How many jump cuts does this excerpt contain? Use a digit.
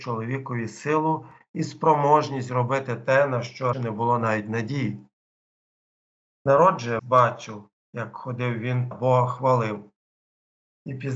3